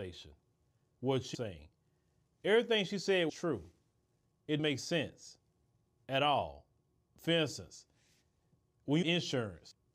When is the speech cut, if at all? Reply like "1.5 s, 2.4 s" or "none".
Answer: 1.3 s, 3.3 s, 4.6 s, 9.0 s